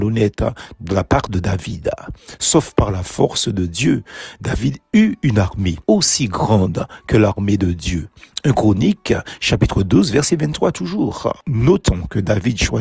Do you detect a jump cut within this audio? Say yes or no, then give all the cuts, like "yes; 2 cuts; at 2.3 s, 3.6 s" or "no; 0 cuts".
yes; 1 cut; at 5.8 s